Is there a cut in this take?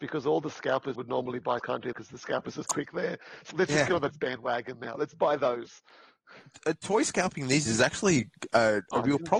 yes; 7 cuts; at 0.9 s, 1.6 s, 1.9 s, 2.6 s, 3.5 s, 4.1 s, 7.7 s

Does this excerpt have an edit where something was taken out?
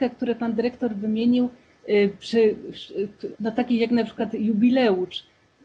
yes; 1 cut; at 3.4 s

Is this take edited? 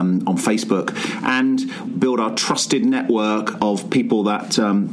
yes; 1 cut; at 1.9 s

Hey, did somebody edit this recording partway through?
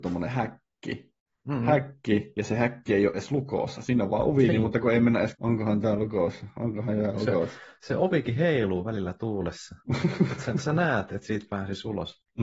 yes; 3 cuts; at 4.5 s, 5.3 s, 9.8 s

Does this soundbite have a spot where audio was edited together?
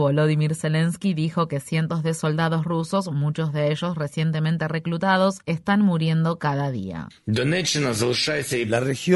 no; 0 cuts

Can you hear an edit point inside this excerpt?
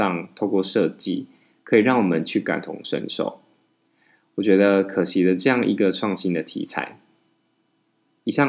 no; 0 cuts

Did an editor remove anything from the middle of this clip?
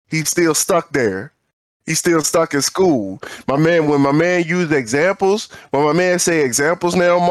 no; 0 cuts

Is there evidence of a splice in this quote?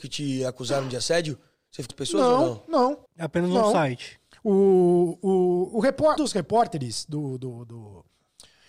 yes; 3 cuts; at 1.9 s, 3.1 s, 6.2 s

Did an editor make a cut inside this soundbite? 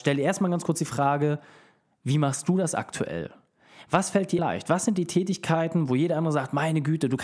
yes; 1 cut; at 4.4 s

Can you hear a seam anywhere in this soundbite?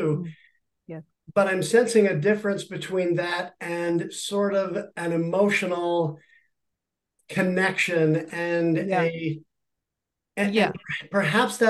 no; 0 cuts

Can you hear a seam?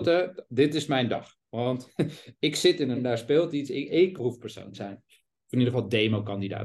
yes; 2 cuts; at 2.9 s, 4.2 s

